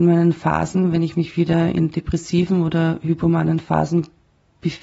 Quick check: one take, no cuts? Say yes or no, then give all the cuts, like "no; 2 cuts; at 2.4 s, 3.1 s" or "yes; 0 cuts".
yes; 0 cuts